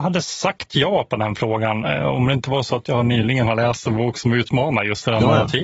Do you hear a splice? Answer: no; 0 cuts

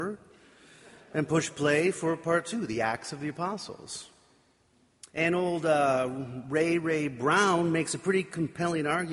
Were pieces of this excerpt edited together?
yes; 1 cut; at 5.1 s

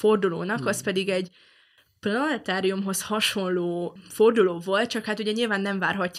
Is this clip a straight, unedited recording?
yes; 0 cuts

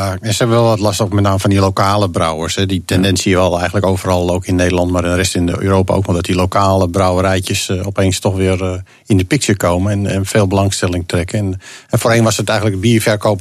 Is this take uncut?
yes; 0 cuts

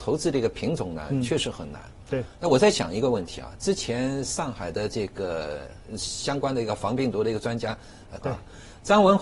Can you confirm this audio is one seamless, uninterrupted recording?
no; 1 cut; at 8.2 s

